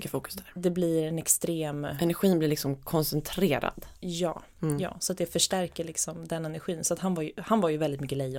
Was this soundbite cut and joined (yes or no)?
no